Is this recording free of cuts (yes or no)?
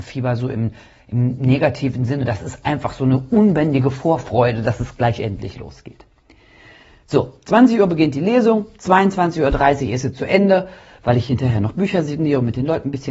yes